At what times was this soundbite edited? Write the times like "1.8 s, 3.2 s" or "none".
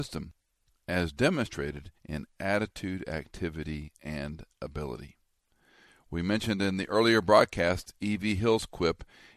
2.0 s